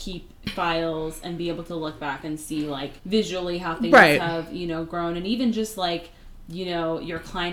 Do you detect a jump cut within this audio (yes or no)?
yes